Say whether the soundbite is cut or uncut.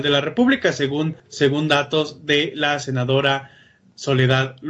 cut